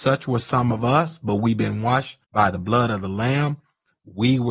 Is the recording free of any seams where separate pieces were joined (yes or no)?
no